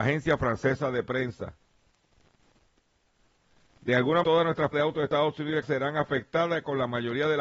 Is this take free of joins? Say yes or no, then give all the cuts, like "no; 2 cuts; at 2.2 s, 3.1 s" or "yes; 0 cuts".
no; 3 cuts; at 4.2 s, 4.7 s, 5.6 s